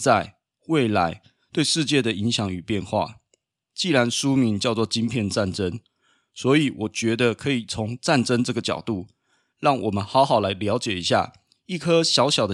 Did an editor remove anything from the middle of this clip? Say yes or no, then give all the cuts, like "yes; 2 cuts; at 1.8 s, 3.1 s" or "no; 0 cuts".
no; 0 cuts